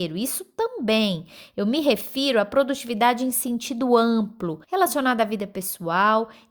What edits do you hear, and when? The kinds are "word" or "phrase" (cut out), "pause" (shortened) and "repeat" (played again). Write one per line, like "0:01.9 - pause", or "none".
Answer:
0:04.6 - pause

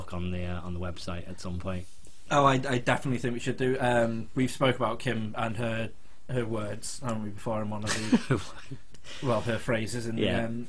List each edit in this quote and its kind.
none

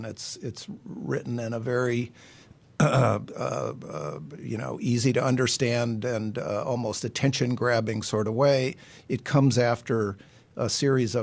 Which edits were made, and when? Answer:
none

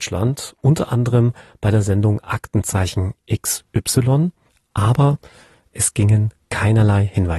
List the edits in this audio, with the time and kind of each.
none

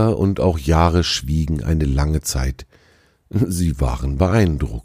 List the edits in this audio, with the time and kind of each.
none

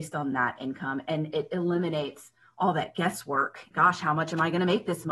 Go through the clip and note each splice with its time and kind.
0:03.7 - word

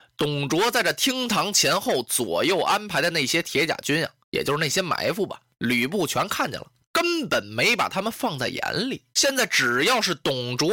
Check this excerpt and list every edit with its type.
0:04.2 - pause
0:09.1 - pause

